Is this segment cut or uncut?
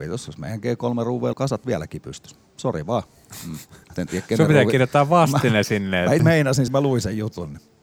cut